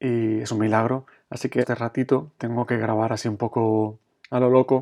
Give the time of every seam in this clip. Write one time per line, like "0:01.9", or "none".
0:01.1
0:01.6
0:02.4